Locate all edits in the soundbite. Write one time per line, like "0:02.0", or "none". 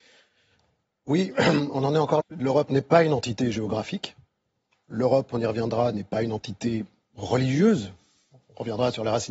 0:02.2